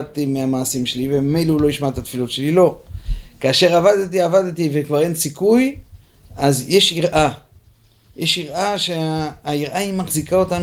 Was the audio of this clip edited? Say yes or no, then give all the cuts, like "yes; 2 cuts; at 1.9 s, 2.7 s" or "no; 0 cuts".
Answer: no; 0 cuts